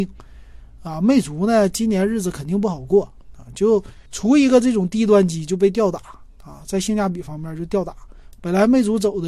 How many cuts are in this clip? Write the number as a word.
one